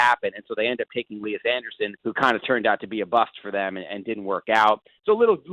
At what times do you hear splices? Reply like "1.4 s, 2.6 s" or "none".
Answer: 2.0 s